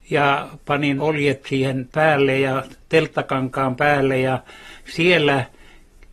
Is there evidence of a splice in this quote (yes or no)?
yes